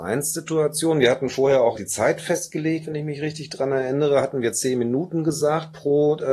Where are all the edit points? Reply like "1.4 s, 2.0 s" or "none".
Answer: 1.8 s